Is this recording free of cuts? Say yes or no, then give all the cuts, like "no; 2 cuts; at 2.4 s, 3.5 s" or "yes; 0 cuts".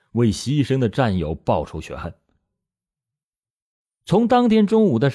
yes; 0 cuts